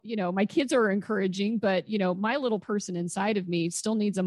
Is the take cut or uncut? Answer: uncut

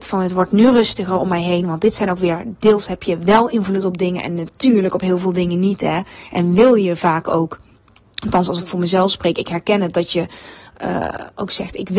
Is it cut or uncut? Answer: uncut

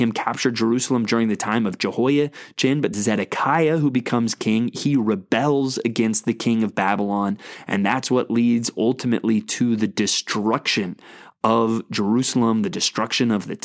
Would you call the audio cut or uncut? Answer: cut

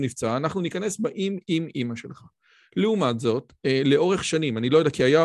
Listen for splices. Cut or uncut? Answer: uncut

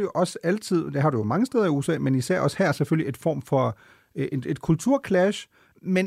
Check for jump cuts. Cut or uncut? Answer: uncut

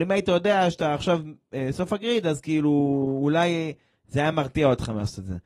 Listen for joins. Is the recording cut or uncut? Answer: uncut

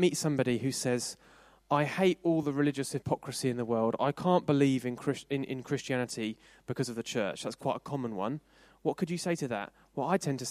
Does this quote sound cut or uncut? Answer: uncut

